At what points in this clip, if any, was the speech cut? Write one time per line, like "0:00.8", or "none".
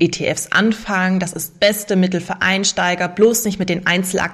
0:01.5